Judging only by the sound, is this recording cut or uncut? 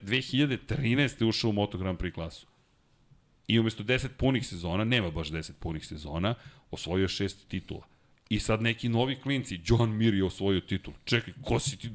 uncut